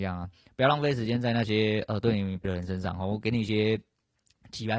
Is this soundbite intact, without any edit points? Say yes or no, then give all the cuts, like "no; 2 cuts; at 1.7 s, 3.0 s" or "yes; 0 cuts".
no; 1 cut; at 2.4 s